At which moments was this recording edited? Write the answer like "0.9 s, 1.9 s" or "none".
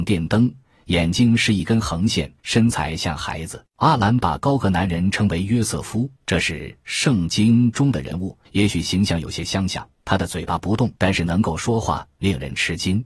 2.4 s, 3.7 s, 6.2 s, 8.4 s, 9.9 s, 11.0 s

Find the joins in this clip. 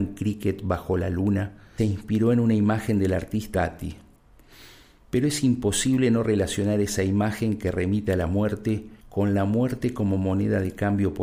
1.8 s, 3.5 s, 9.0 s

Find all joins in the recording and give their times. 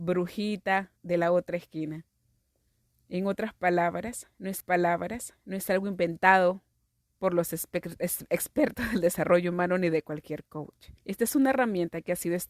1.0 s, 4.6 s, 6.7 s, 11.0 s

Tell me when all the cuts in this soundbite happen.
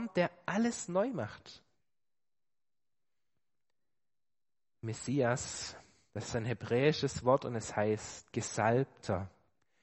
none

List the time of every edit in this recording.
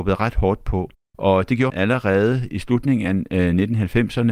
0.9 s, 1.7 s

